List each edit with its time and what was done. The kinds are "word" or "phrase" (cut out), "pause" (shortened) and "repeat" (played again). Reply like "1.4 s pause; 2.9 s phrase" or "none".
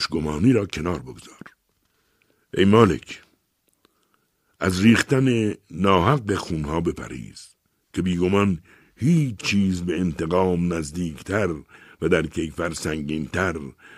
none